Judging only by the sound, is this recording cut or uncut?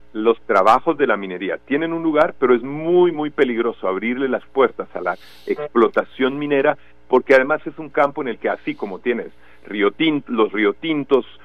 uncut